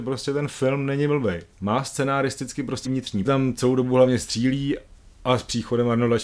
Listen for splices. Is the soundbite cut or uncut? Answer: cut